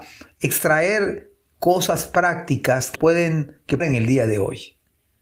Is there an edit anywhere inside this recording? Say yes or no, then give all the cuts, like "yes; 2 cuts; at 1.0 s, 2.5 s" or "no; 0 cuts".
yes; 2 cuts; at 2.9 s, 3.8 s